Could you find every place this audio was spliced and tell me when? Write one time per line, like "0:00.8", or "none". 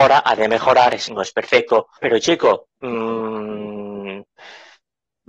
0:01.1
0:02.0